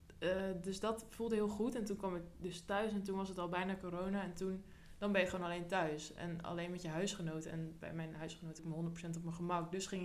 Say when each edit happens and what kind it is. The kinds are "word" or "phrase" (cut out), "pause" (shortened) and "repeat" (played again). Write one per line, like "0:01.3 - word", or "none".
0:08.6 - word